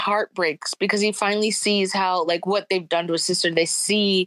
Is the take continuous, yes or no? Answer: yes